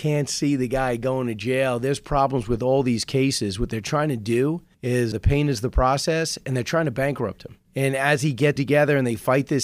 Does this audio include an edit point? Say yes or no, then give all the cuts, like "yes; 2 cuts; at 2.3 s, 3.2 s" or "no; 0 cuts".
yes; 3 cuts; at 5.1 s, 7.7 s, 8.6 s